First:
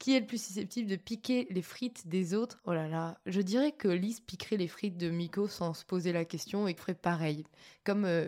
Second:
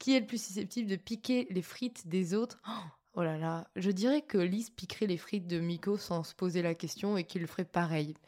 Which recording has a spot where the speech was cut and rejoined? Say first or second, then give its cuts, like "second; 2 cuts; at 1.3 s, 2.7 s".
first; 2 cuts; at 2.6 s, 6.8 s